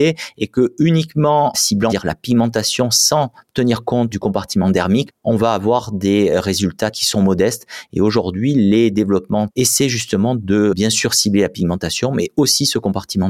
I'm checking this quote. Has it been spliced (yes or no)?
yes